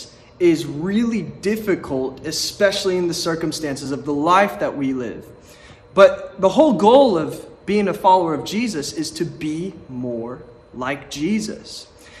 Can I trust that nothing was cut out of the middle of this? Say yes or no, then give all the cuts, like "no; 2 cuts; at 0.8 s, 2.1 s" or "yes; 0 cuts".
yes; 0 cuts